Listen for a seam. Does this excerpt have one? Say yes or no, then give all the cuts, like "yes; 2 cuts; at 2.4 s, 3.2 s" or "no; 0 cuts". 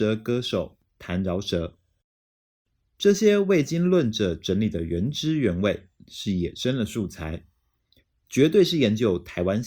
yes; 1 cut; at 6.0 s